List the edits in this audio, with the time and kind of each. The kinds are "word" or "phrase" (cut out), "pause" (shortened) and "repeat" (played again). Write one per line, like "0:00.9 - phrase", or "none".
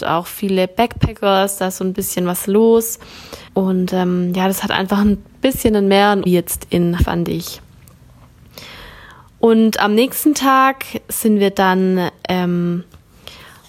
0:03.5 - pause
0:06.3 - phrase
0:07.0 - word